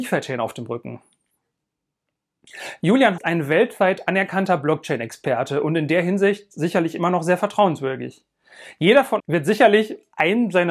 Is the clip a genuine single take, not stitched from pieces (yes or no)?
no